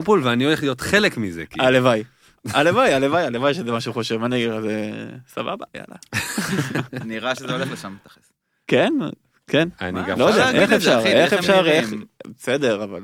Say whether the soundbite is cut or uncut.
uncut